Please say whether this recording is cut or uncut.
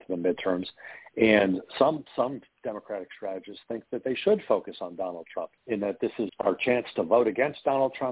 cut